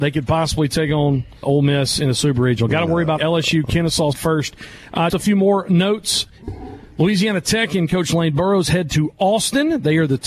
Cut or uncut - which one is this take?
cut